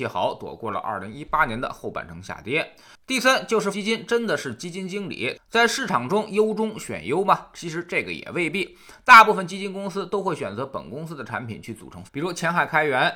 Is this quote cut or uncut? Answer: cut